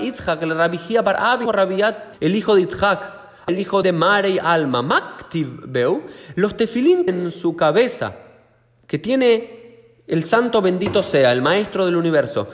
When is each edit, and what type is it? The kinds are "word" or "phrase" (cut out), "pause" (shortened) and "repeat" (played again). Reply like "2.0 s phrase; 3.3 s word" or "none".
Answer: 1.5 s phrase; 2.1 s word; 3.5 s word; 3.8 s phrase; 7.1 s phrase